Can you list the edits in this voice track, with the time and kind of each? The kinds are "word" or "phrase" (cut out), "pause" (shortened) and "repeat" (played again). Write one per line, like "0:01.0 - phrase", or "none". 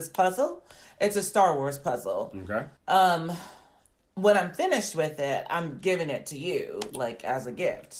0:02.8 - pause